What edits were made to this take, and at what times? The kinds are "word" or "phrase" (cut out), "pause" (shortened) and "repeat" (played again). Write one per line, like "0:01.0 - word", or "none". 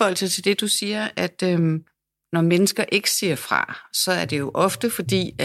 none